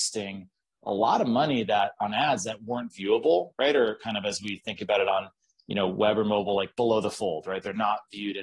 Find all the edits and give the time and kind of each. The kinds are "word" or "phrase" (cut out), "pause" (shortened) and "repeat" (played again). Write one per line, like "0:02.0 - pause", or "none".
none